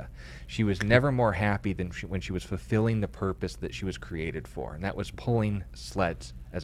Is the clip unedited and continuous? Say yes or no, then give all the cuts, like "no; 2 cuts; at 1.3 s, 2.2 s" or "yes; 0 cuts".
yes; 0 cuts